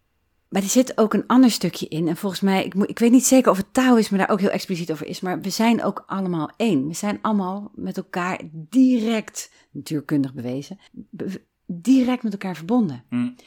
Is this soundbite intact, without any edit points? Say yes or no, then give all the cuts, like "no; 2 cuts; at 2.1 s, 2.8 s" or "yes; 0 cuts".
no; 1 cut; at 10.9 s